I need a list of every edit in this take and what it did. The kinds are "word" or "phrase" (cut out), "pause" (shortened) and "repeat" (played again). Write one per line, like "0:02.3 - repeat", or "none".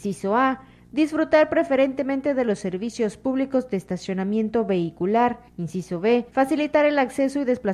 0:05.5 - pause
0:06.3 - pause